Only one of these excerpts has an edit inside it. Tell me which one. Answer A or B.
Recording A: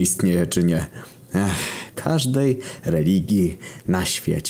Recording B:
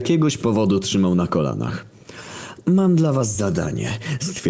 A